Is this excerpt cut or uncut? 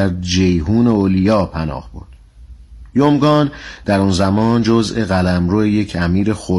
uncut